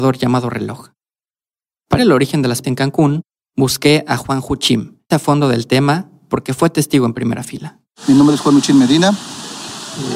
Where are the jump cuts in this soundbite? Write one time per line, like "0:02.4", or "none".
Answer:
0:02.0
0:02.6
0:05.1